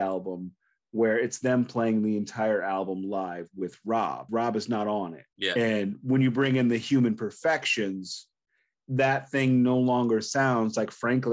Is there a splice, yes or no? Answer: yes